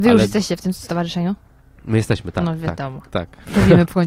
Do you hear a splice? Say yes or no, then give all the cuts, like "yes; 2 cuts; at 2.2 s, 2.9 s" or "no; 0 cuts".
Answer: no; 0 cuts